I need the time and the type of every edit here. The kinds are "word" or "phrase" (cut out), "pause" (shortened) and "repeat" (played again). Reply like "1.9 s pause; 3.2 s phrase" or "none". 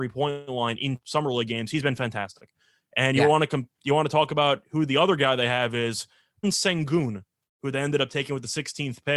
1.0 s word; 6.4 s word